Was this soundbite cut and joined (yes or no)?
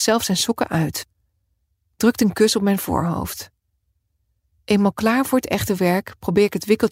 no